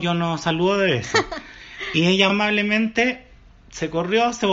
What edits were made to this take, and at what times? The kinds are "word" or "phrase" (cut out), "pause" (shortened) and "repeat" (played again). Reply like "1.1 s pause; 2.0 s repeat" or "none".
2.3 s word